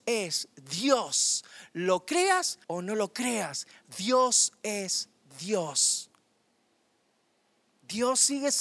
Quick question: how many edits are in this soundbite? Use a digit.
1